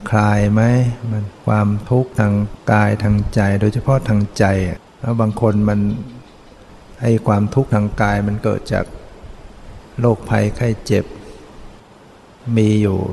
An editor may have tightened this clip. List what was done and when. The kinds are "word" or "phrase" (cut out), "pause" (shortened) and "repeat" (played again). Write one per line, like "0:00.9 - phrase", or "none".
0:01.4 - pause
0:02.6 - pause
0:04.9 - pause

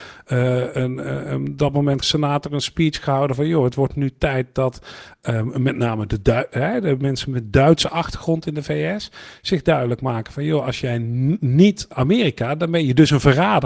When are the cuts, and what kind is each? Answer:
0:02.0 - word
0:11.9 - phrase

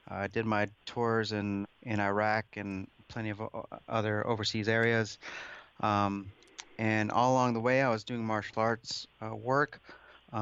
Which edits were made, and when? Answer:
0:01.6 - word

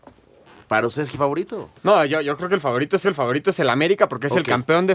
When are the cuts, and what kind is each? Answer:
0:01.1 - word
0:01.8 - pause
0:03.0 - repeat

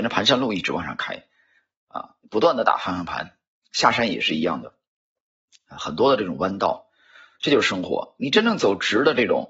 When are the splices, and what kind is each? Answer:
none

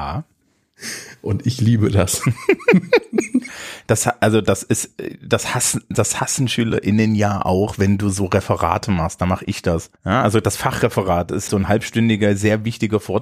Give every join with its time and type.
0:10.0 - pause
0:11.5 - word

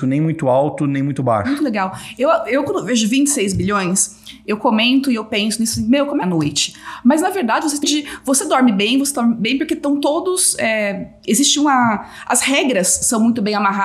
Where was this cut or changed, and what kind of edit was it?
0:06.2 - phrase
0:07.8 - phrase

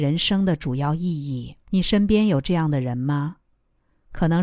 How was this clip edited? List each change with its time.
0:01.6 - pause

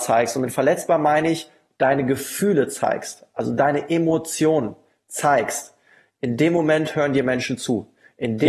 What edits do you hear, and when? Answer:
none

